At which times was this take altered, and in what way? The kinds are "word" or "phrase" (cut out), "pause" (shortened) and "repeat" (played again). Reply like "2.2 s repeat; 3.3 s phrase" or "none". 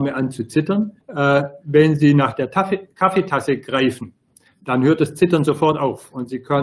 1.0 s pause